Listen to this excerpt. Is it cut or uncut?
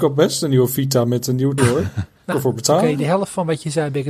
cut